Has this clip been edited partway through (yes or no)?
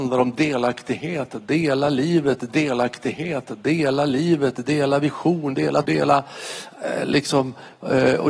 yes